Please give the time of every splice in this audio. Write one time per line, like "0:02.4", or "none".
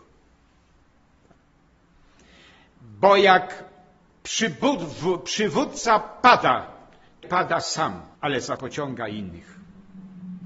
0:07.2
0:08.1
0:08.6